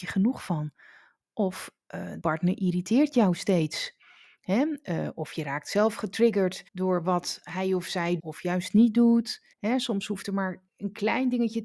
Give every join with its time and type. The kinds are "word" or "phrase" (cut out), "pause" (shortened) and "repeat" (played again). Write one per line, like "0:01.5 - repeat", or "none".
0:02.2 - word
0:06.7 - pause
0:08.2 - word
0:09.5 - pause
0:10.7 - pause